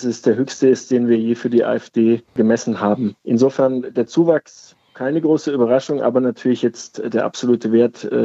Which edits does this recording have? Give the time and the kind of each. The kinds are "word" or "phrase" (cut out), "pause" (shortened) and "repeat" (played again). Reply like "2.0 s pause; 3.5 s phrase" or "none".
2.3 s pause; 3.2 s pause